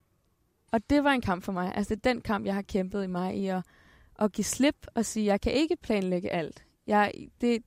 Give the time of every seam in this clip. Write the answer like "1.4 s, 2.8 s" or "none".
none